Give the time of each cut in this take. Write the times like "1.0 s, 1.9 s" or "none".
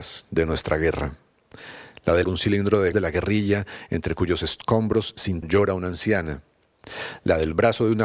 2.2 s, 2.9 s, 5.4 s